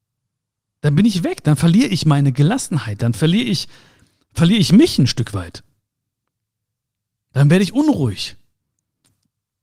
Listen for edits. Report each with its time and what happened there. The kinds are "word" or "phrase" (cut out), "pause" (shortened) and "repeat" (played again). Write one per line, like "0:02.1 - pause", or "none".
none